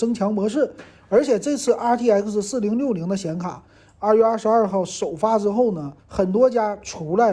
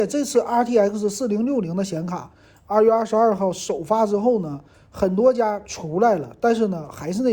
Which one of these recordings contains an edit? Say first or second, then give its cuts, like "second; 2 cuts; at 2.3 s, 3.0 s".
first; 1 cut; at 6.0 s